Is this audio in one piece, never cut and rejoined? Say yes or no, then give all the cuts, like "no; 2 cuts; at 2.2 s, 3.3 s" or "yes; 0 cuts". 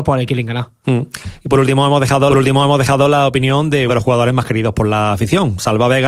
no; 2 cuts; at 2.3 s, 3.9 s